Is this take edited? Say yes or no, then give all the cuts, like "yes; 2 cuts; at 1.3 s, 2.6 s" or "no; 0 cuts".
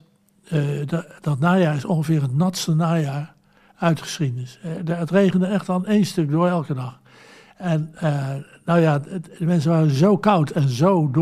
no; 0 cuts